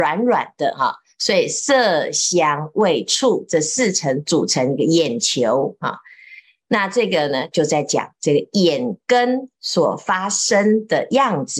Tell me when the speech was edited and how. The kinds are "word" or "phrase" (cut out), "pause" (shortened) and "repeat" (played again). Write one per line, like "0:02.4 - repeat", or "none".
none